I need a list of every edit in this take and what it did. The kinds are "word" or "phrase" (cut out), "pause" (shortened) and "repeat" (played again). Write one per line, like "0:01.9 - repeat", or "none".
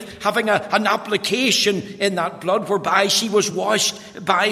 none